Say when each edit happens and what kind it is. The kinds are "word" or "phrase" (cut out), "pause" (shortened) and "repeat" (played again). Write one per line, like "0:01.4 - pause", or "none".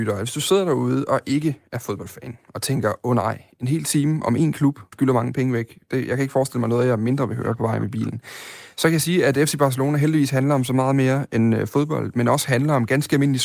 0:04.9 - word